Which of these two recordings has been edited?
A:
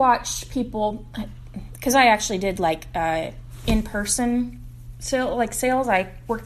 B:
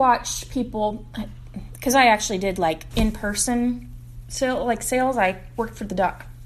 B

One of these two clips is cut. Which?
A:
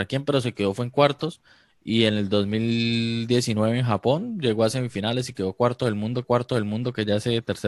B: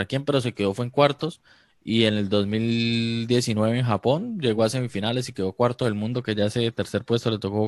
A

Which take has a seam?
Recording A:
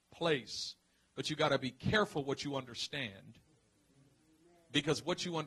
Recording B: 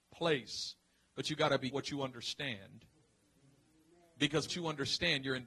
B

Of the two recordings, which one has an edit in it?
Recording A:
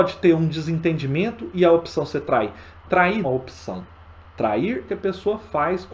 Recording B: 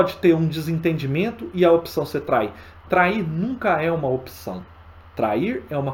A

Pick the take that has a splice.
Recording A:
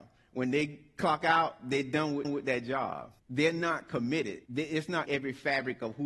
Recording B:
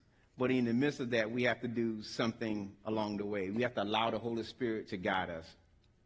A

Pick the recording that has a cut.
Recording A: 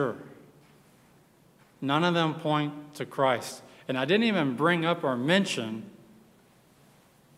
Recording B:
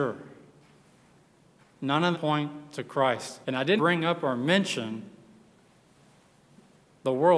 B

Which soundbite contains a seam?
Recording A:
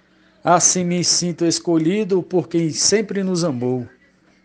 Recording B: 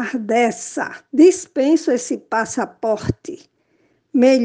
B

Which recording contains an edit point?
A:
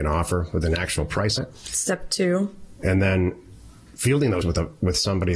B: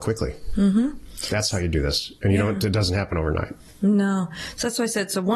A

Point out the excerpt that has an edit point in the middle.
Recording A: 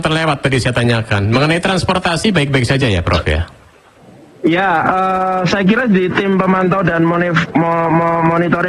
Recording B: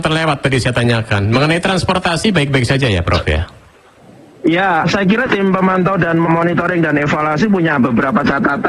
B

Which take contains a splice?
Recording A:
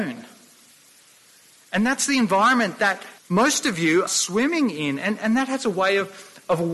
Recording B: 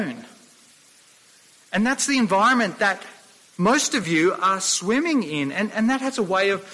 A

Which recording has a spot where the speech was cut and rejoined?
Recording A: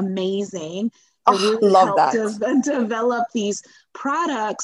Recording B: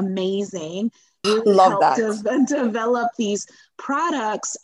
B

